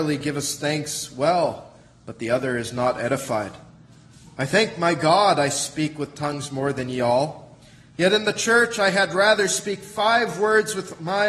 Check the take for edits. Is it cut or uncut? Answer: uncut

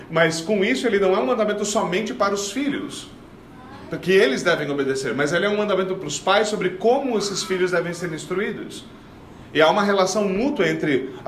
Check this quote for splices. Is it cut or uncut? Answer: uncut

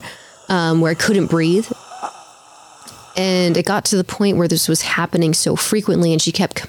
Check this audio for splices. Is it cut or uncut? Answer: uncut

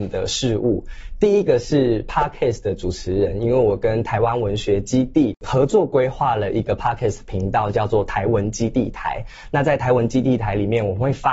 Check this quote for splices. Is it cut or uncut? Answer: uncut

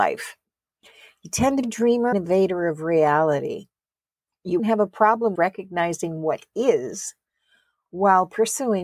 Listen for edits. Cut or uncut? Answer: cut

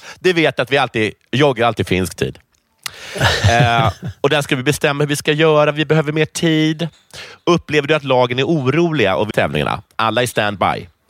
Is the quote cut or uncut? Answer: cut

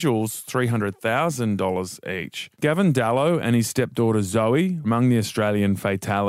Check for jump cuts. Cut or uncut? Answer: cut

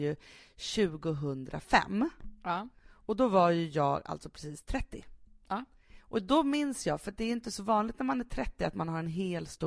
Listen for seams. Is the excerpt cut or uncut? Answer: uncut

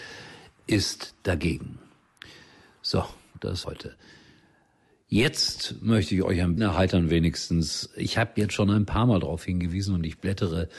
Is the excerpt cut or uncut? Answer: cut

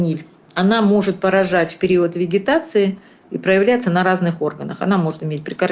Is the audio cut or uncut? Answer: uncut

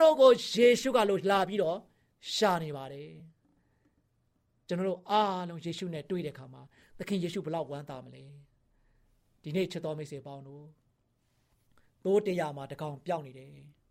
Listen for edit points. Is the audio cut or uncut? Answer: uncut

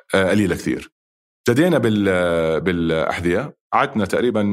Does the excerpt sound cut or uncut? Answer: uncut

